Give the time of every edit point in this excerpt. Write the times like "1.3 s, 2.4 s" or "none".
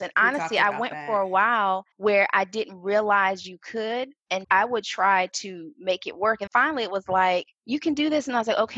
1.9 s, 4.4 s, 6.5 s, 7.5 s